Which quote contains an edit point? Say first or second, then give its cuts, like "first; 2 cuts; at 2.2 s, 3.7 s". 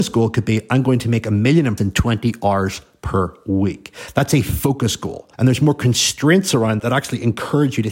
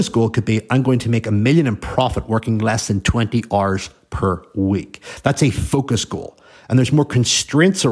first; 3 cuts; at 1.8 s, 5.3 s, 6.8 s